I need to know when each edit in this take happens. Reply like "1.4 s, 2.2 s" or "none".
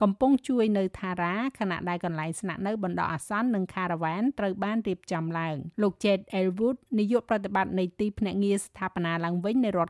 5.7 s